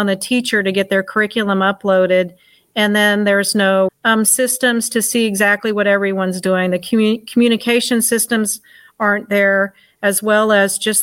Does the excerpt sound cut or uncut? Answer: cut